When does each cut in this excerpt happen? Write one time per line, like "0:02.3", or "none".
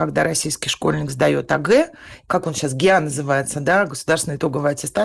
none

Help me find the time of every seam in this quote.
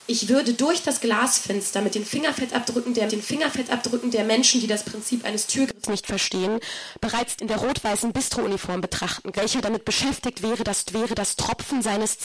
0:03.1
0:07.4
0:09.3
0:10.9

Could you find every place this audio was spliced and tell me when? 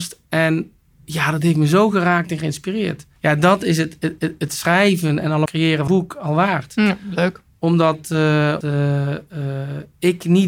0:03.2
0:04.2
0:05.5
0:05.9
0:08.6

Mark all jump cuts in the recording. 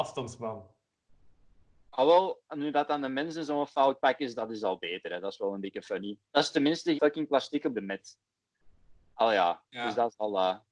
0:06.3
0:06.9
0:07.7

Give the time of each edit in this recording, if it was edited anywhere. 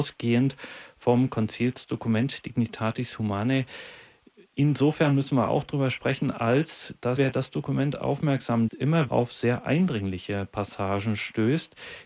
0:07.2
0:08.7
0:09.1

